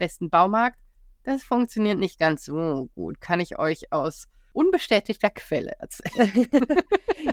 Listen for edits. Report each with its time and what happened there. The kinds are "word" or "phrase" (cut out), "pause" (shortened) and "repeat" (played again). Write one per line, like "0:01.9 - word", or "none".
none